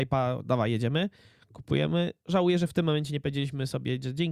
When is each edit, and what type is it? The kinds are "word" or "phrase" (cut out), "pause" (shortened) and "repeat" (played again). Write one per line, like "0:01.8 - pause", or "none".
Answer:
none